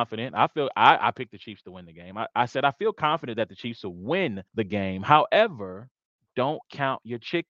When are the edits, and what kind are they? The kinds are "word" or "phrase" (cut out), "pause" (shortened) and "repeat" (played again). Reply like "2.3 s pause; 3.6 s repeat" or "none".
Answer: 4.5 s pause